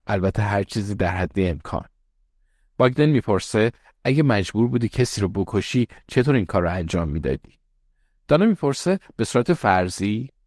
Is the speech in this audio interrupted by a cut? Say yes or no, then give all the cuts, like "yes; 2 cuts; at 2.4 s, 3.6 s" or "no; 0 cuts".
no; 0 cuts